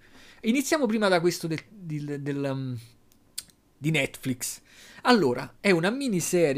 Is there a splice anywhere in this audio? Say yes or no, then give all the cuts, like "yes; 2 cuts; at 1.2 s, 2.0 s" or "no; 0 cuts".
no; 0 cuts